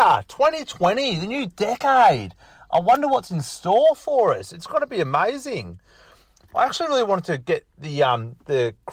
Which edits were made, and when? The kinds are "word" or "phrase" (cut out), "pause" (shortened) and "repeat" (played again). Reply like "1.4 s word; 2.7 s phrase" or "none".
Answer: none

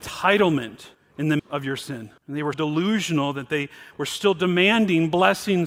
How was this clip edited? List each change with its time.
0.9 s pause; 1.4 s word; 2.2 s pause; 2.5 s word

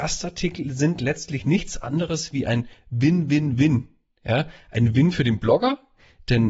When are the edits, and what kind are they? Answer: none

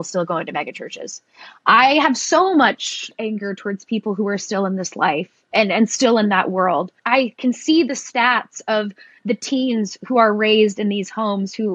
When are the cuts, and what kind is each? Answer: 7.0 s pause

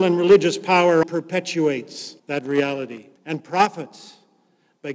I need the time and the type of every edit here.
1.0 s word; 2.2 s pause; 3.2 s pause

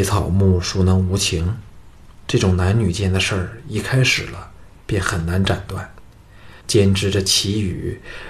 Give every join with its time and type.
6.6 s pause

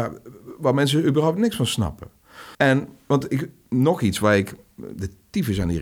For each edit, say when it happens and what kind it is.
2.5 s pause

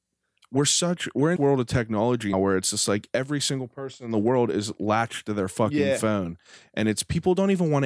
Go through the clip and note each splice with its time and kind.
1.4 s word; 2.3 s word

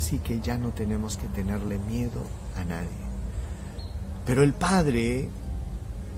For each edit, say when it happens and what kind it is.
none

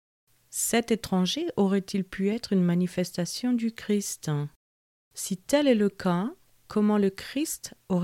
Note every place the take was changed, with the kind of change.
none

